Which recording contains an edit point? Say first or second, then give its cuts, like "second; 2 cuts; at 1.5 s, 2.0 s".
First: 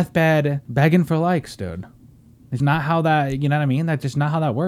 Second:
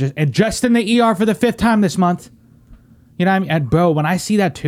first; 1 cut; at 2.6 s